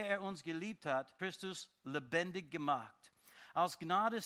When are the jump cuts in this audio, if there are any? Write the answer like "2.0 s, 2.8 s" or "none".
1.2 s